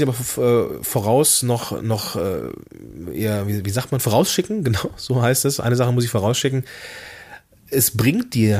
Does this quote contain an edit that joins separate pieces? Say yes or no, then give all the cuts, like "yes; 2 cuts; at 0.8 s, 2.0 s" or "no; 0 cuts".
no; 0 cuts